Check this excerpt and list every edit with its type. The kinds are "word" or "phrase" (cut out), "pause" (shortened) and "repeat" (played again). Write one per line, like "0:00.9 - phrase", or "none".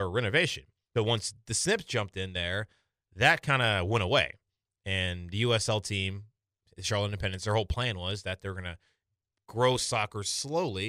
none